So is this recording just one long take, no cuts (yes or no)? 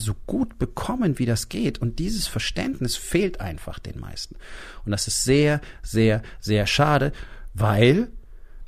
yes